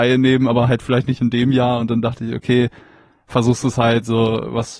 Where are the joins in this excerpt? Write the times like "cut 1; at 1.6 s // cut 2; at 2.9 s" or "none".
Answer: none